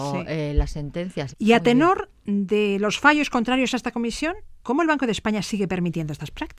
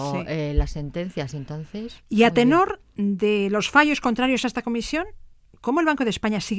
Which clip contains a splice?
first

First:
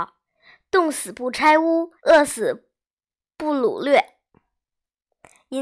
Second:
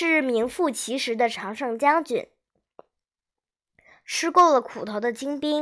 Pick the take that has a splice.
first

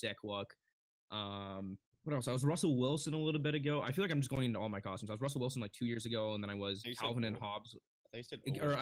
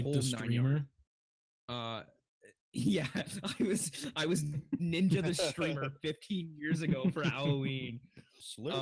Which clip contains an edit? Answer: first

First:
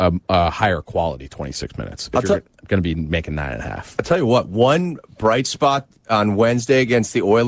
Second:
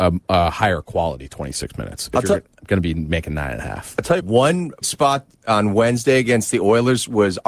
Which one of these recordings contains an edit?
second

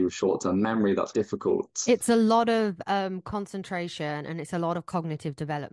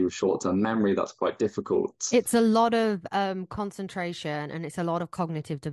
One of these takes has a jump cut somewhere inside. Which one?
first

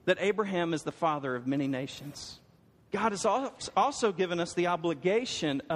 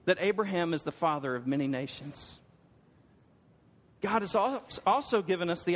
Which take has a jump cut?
first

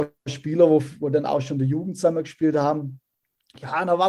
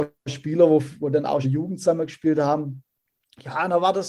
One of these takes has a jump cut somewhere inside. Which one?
second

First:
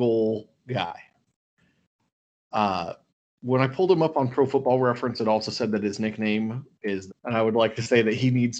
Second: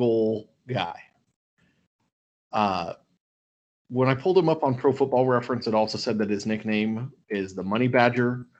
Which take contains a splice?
first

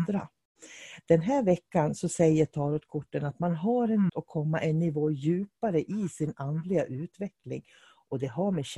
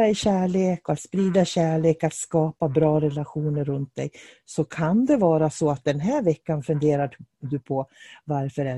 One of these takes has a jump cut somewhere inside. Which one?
first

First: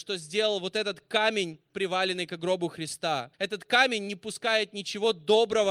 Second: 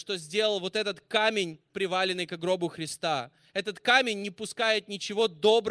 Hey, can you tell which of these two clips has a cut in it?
first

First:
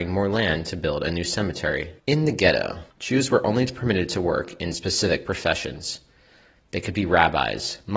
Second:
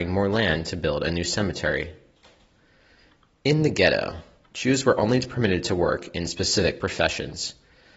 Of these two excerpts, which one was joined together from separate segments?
first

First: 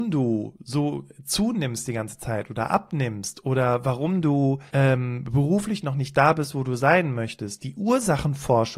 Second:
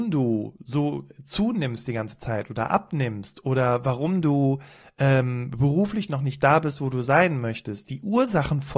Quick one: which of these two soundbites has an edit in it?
first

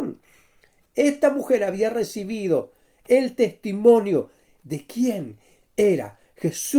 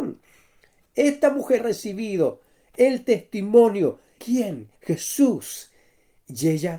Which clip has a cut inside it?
second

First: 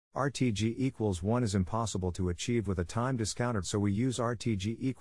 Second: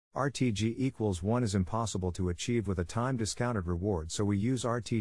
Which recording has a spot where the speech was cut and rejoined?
first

